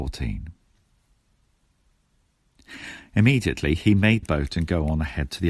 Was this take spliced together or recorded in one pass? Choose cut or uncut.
cut